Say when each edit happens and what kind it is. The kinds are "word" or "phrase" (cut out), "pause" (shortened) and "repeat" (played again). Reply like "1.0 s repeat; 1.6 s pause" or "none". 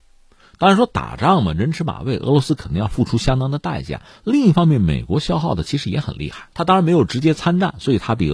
6.5 s pause